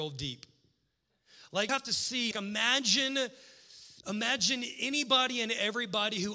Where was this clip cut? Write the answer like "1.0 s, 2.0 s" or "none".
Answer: 1.7 s, 2.3 s, 4.0 s